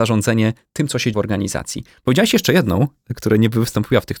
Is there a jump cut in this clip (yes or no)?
yes